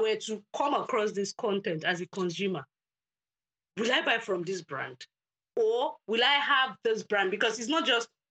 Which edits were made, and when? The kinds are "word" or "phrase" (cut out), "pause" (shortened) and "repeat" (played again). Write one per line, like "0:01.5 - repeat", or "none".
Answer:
none